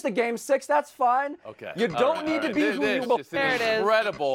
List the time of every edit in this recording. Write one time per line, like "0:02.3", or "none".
0:03.0